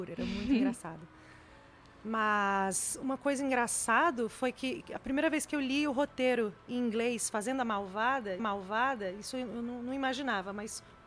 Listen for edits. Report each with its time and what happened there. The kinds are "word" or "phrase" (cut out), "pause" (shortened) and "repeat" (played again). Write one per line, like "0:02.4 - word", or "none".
0:08.4 - repeat